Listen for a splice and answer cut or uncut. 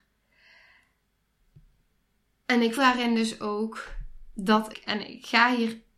cut